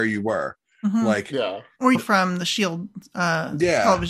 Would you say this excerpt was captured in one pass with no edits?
no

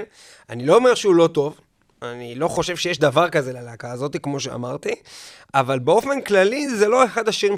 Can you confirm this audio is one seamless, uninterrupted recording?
yes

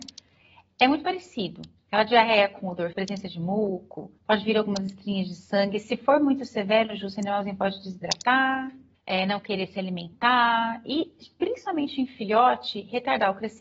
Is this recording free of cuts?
no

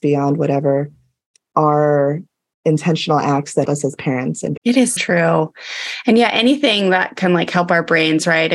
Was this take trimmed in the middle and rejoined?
yes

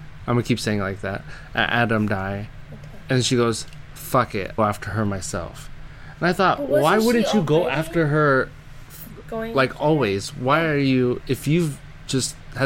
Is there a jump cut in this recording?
yes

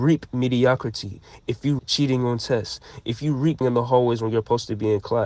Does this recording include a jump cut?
yes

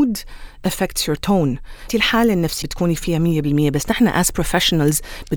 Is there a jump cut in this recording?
yes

